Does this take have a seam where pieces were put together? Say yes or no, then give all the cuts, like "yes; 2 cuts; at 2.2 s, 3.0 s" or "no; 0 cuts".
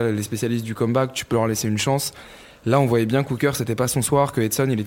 no; 0 cuts